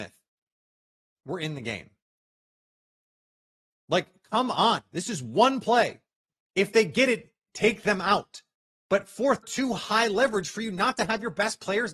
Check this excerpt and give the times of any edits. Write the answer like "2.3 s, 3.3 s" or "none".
9.4 s